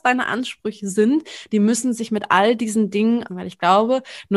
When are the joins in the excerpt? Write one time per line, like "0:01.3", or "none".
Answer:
0:03.3